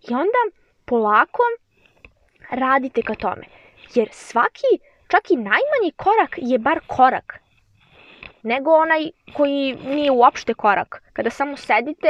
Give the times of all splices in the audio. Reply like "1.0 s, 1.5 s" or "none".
none